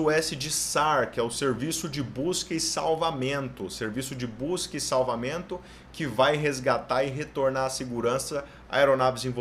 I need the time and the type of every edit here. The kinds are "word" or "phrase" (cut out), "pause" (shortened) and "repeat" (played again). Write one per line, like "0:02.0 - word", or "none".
none